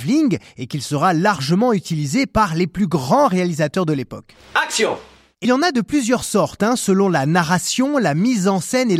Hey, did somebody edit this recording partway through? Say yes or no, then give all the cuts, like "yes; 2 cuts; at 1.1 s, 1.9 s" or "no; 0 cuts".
yes; 1 cut; at 5.4 s